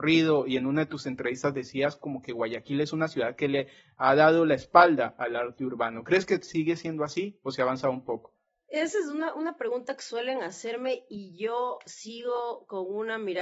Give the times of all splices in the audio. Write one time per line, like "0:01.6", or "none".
none